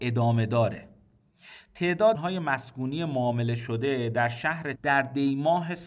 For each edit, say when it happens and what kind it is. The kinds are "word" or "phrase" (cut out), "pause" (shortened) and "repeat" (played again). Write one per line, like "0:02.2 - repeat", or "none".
0:02.1 - word
0:04.7 - word